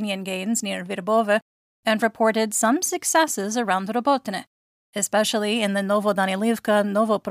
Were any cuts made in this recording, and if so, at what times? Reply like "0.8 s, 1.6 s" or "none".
none